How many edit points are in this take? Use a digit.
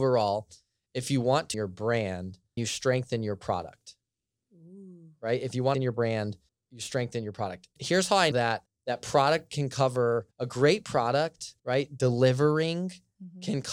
9